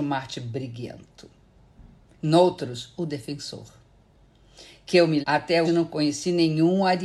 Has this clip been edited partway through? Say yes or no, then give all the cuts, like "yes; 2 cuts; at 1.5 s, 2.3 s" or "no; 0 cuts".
yes; 2 cuts; at 5.2 s, 5.6 s